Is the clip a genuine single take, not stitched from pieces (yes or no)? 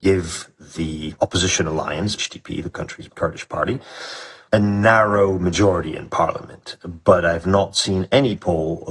no